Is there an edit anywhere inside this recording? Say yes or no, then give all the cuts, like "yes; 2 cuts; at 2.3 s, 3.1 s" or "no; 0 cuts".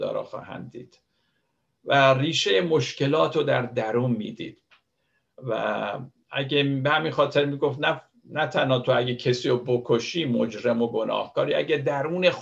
no; 0 cuts